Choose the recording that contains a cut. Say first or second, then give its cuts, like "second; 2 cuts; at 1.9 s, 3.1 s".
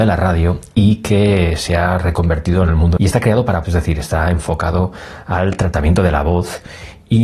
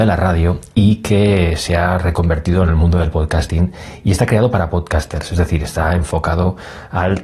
first; 2 cuts; at 3.0 s, 3.6 s